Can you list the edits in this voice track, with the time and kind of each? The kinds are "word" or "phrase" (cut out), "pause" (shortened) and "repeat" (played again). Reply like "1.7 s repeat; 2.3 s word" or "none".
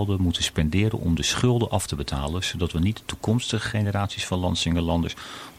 none